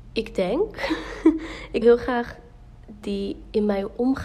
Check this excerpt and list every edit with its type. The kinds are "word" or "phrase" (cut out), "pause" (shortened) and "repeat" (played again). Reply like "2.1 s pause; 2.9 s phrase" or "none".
1.8 s word; 3.0 s phrase